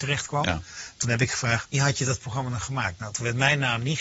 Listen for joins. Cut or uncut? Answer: cut